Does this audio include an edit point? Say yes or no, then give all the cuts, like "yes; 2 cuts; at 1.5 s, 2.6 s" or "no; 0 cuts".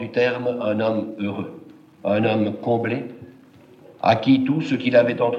no; 0 cuts